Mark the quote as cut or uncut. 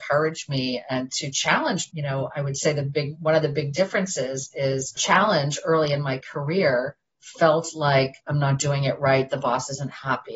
uncut